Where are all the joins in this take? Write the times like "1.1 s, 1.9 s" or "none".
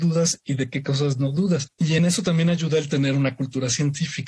none